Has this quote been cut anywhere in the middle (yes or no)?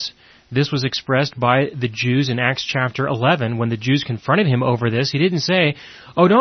no